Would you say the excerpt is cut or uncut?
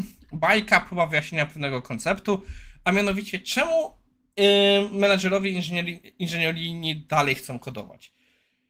uncut